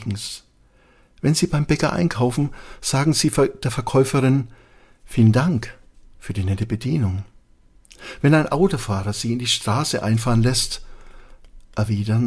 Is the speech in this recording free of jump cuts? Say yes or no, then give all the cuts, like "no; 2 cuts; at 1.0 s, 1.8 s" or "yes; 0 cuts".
yes; 0 cuts